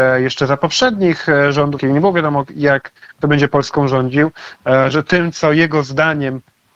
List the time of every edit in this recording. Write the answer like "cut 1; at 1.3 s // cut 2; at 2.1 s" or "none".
cut 1; at 1.8 s

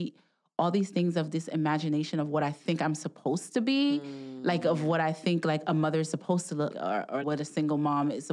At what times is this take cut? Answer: cut 1; at 6.7 s // cut 2; at 7.2 s

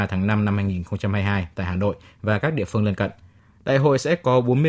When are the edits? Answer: none

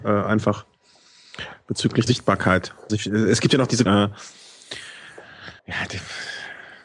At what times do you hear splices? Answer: cut 1; at 2.1 s // cut 2; at 2.9 s // cut 3; at 3.9 s // cut 4; at 5.6 s

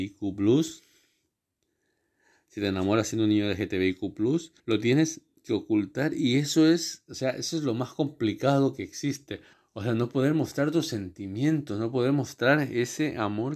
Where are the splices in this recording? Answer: cut 1; at 4.6 s // cut 2; at 9.5 s

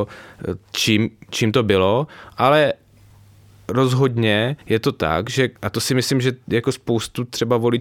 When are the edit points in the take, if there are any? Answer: cut 1; at 4.6 s // cut 2; at 5.6 s

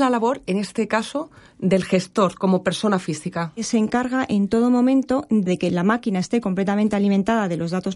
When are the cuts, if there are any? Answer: none

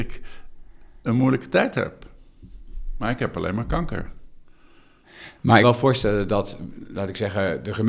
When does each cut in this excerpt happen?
cut 1; at 5.6 s

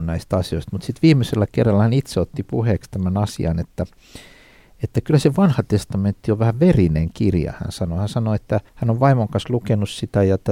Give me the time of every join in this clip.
cut 1; at 8.7 s

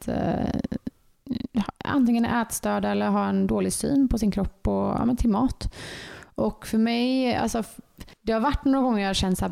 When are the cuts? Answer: cut 1; at 8.1 s

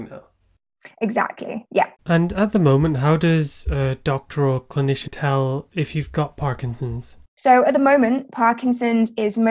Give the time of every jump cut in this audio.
cut 1; at 2.0 s // cut 2; at 5.1 s // cut 3; at 7.2 s

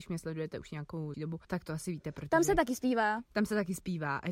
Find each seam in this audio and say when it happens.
cut 1; at 1.1 s // cut 2; at 1.4 s

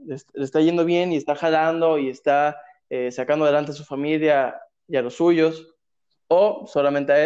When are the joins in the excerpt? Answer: none

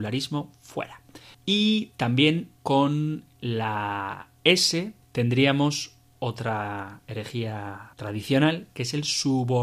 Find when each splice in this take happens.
cut 1; at 1.3 s // cut 2; at 2.6 s // cut 3; at 5.0 s // cut 4; at 7.9 s

